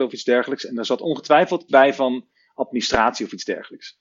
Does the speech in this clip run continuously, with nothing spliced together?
no; 1 cut; at 1.7 s

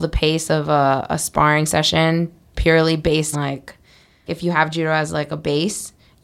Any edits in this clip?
yes; 3 cuts; at 2.5 s, 3.3 s, 4.3 s

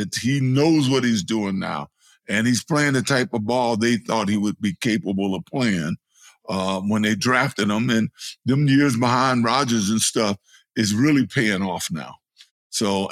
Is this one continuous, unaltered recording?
yes; 0 cuts

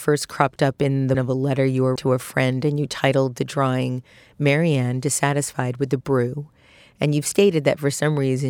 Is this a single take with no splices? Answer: no; 3 cuts; at 1.1 s, 2.0 s, 6.0 s

